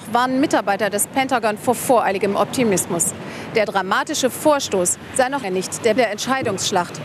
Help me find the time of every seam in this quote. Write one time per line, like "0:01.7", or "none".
0:05.4
0:06.0